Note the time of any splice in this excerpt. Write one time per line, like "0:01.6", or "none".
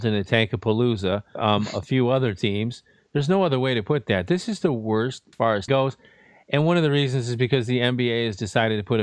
0:01.4
0:05.3
0:05.7

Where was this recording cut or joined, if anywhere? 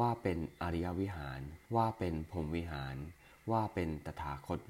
0:01.7

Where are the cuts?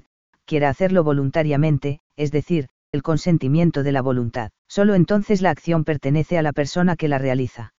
0:02.1
0:02.9
0:04.6

